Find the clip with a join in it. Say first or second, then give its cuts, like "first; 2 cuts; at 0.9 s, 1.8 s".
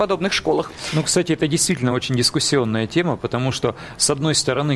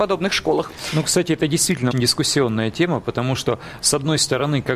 second; 1 cut; at 1.9 s